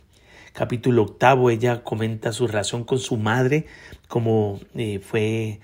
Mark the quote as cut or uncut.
uncut